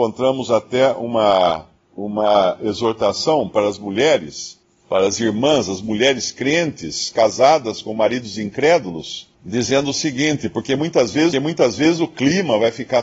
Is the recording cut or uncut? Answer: cut